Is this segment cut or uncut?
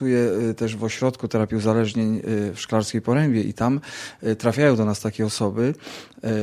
uncut